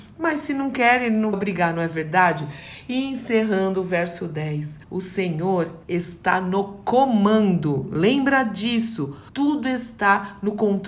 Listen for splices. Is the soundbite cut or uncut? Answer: cut